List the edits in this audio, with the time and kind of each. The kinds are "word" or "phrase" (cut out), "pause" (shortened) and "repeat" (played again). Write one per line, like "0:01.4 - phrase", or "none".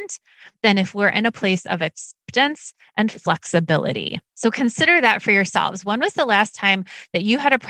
0:04.3 - pause

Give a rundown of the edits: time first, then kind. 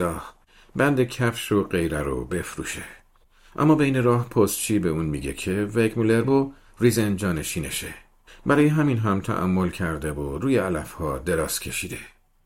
0:06.2 - word

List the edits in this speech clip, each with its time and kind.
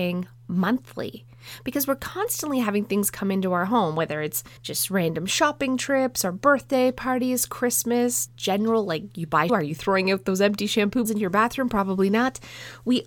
0:04.6 - pause
0:08.3 - word
0:09.5 - word
0:11.1 - word

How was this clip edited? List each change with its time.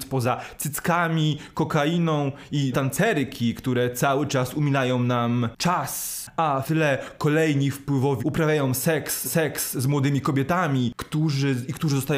0:02.7 - phrase
0:06.6 - word
0:08.2 - word
0:09.2 - repeat

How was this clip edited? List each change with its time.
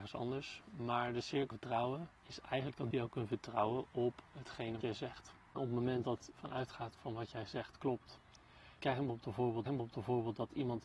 0:01.5 - word
0:02.2 - pause
0:02.9 - word
0:04.8 - word
0:06.3 - word
0:08.8 - word
0:09.7 - repeat

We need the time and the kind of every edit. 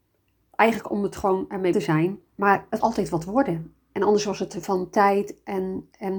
0:01.7 - word
0:02.3 - pause
0:02.8 - word
0:04.6 - word

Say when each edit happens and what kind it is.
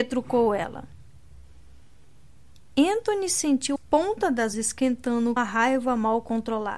0:03.8 - word
0:04.5 - word
0:05.4 - word

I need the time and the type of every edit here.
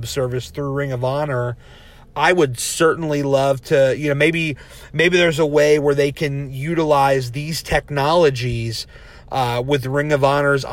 none

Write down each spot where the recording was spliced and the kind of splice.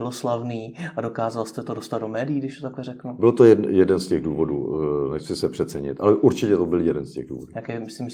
none

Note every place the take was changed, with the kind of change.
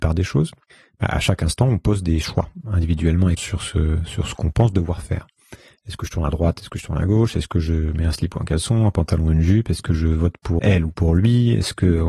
0:03.4 - word
0:10.6 - word

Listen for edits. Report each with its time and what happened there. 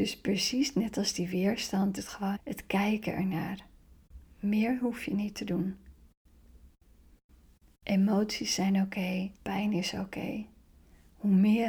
0:02.0 - word
0:02.4 - word
0:09.4 - pause

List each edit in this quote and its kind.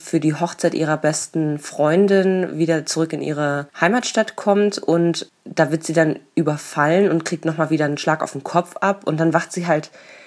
none

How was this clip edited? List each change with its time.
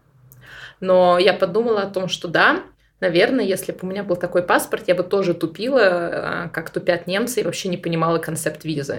none

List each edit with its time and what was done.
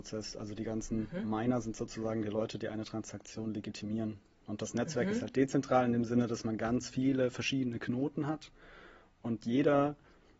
none

